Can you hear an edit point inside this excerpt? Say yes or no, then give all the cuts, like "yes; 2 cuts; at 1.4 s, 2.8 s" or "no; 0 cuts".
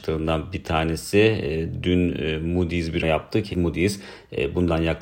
yes; 2 cuts; at 3.0 s, 3.5 s